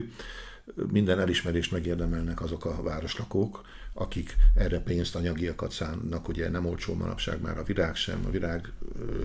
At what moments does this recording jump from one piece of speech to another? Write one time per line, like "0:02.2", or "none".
none